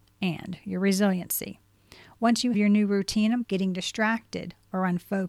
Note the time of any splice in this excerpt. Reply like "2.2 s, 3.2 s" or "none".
2.5 s, 3.4 s